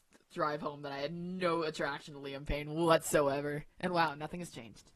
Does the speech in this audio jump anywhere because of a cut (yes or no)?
no